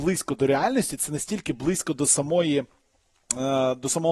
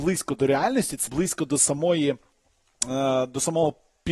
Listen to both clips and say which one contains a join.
second; 1 cut; at 1.1 s

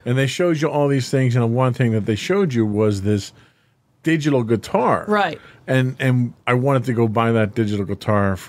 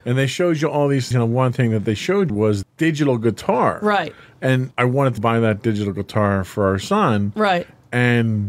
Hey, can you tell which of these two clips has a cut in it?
second; 5 cuts; at 1.1 s, 2.3 s, 2.6 s, 4.7 s, 5.2 s

